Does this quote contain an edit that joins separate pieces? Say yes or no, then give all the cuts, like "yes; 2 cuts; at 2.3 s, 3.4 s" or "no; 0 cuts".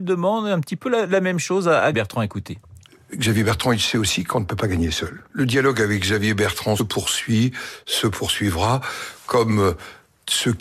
yes; 2 cuts; at 1.9 s, 6.8 s